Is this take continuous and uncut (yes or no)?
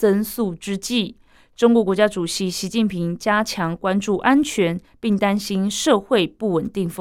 yes